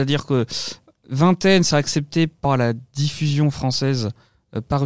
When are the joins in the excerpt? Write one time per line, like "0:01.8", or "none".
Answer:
0:01.7
0:02.4